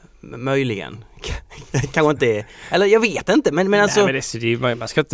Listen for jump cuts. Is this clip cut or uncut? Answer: uncut